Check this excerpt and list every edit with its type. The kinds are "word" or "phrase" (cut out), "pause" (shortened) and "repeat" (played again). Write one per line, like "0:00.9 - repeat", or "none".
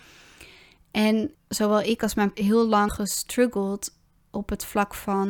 0:01.3 - phrase
0:02.3 - word
0:02.9 - word